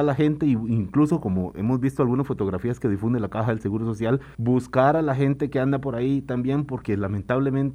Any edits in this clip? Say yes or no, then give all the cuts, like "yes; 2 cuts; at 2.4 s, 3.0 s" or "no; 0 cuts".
yes; 1 cut; at 4.3 s